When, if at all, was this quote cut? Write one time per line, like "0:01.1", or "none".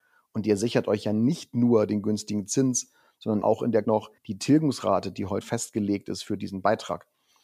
0:03.4
0:03.8
0:04.2
0:05.4